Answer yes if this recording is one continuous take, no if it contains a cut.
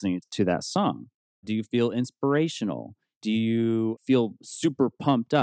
yes